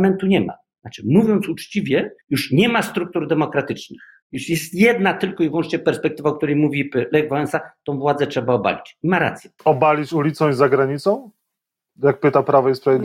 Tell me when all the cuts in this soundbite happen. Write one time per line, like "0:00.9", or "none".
0:02.2
0:04.2
0:09.6